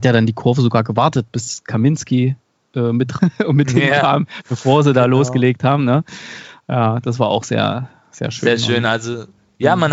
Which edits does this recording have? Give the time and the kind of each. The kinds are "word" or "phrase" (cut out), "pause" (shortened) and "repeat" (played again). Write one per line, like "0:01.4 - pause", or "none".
0:03.2 - word